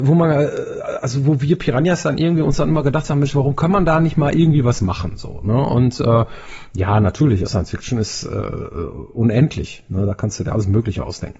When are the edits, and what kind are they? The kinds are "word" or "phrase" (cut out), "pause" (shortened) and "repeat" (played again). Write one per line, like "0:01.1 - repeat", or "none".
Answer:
0:07.5 - word